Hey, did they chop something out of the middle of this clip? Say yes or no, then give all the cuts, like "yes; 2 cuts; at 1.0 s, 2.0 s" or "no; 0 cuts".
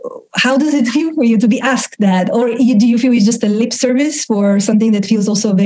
no; 0 cuts